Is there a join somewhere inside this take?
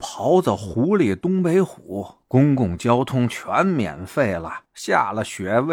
no; 0 cuts

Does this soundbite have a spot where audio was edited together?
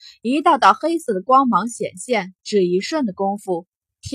yes; 1 cut; at 2.4 s

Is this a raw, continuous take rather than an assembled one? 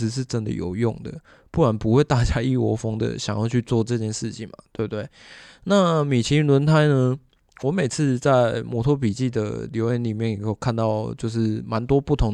yes; 0 cuts

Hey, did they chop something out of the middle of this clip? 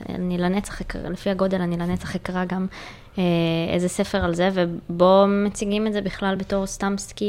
no; 0 cuts

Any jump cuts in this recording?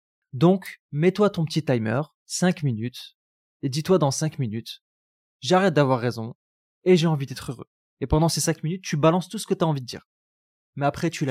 no; 0 cuts

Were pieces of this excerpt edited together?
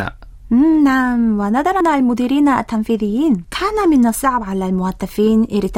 yes; 2 cuts; at 1.8 s, 3.4 s

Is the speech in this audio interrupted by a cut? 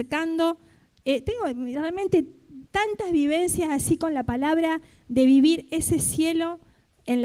yes; 1 cut; at 2.7 s

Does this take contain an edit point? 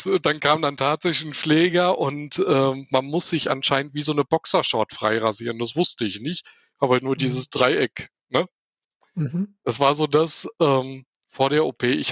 no; 0 cuts

